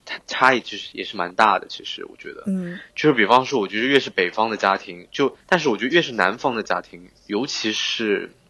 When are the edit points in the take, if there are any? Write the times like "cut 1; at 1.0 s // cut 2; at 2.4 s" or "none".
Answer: cut 1; at 5.4 s